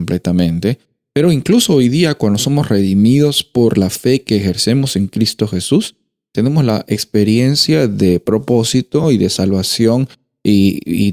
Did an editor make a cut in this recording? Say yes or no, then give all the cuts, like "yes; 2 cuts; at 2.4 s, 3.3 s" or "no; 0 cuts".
no; 0 cuts